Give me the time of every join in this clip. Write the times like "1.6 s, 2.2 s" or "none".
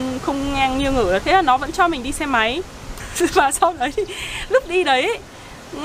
1.2 s, 3.0 s

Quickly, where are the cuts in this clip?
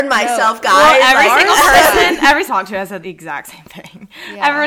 2.5 s, 3.0 s

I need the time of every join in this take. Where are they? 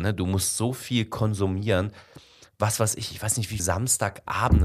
3.6 s

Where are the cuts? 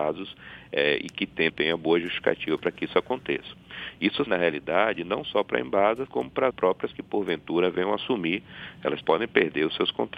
1.5 s, 4.3 s, 6.1 s, 6.5 s, 6.9 s, 9.0 s

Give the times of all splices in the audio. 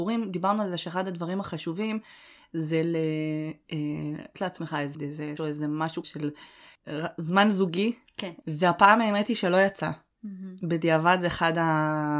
4.3 s, 4.9 s, 5.4 s, 6.0 s

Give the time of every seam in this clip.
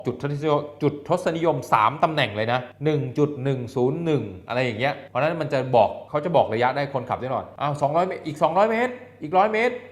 none

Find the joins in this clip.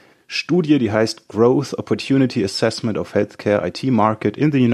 none

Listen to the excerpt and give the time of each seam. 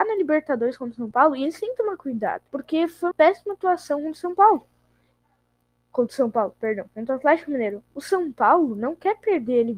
2.5 s, 3.1 s

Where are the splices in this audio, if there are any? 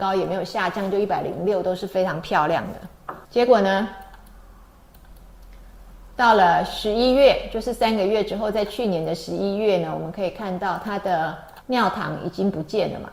3.2 s, 11.6 s

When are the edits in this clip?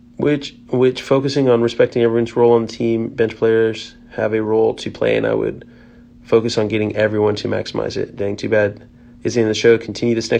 none

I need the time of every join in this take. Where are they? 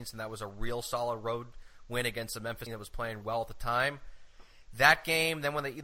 2.7 s, 3.2 s

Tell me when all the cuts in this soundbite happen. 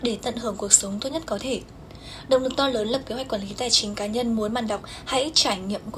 none

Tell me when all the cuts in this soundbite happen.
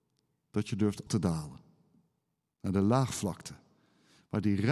1.1 s

